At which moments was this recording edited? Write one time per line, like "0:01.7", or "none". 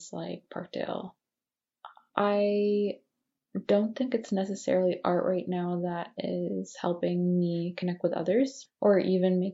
none

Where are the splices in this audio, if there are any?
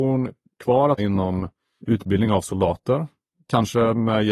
0:01.0
0:01.8

